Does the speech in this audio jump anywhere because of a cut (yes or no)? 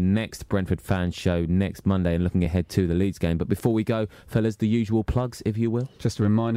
no